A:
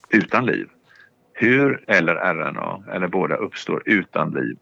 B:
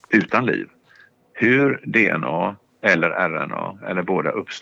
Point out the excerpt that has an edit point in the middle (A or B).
A